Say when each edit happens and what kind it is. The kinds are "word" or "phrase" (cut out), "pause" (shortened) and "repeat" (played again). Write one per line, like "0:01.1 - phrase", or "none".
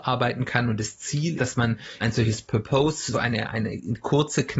0:01.4 - word
0:02.0 - word
0:03.1 - phrase